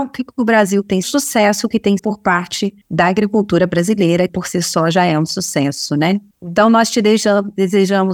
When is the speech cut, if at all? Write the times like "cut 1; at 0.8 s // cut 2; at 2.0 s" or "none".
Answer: cut 1; at 1.0 s // cut 2; at 2.0 s // cut 3; at 2.8 s // cut 4; at 4.3 s // cut 5; at 6.3 s

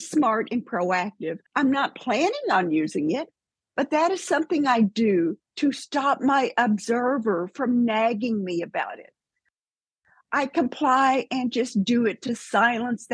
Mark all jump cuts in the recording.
cut 1; at 1.5 s

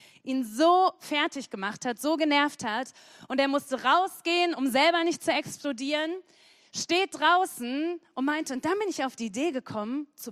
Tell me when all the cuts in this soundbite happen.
none

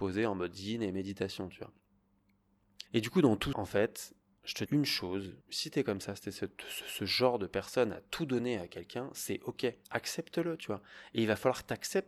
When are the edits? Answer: cut 1; at 2.9 s // cut 2; at 3.5 s // cut 3; at 4.7 s // cut 4; at 5.4 s // cut 5; at 6.8 s // cut 6; at 9.8 s

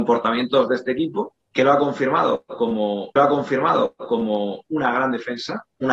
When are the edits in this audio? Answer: cut 1; at 1.4 s // cut 2; at 3.2 s

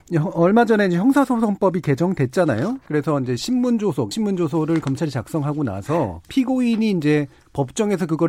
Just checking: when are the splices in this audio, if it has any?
cut 1; at 4.1 s // cut 2; at 6.2 s

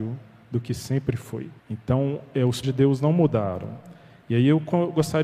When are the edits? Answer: cut 1; at 1.6 s // cut 2; at 2.6 s

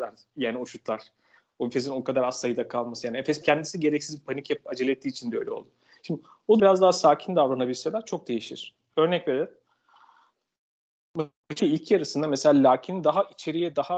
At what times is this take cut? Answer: cut 1; at 3.4 s // cut 2; at 6.6 s // cut 3; at 11.6 s

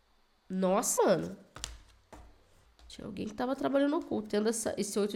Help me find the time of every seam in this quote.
cut 1; at 1.0 s // cut 2; at 2.6 s

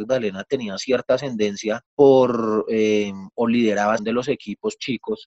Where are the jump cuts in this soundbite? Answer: cut 1; at 1.9 s // cut 2; at 3.3 s // cut 3; at 4.0 s

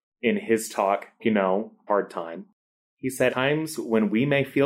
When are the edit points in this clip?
cut 1; at 1.2 s // cut 2; at 1.9 s // cut 3; at 3.3 s

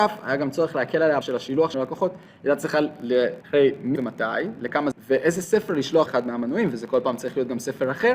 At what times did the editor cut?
cut 1; at 1.2 s // cut 2; at 1.7 s // cut 3; at 3.4 s // cut 4; at 4.0 s // cut 5; at 4.9 s // cut 6; at 6.1 s

